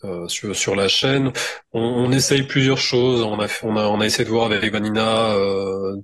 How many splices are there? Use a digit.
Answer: 0